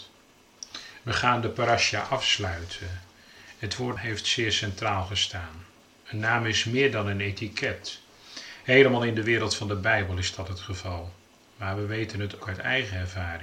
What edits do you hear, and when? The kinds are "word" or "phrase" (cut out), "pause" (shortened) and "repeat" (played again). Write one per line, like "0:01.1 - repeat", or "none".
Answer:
0:04.0 - word
0:12.4 - word